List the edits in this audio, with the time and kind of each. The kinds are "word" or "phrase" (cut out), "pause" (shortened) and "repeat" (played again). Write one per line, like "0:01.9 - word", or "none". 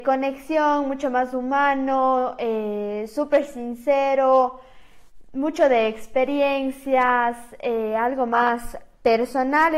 none